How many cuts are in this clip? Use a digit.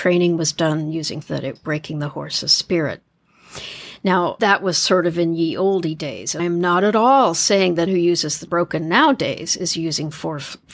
6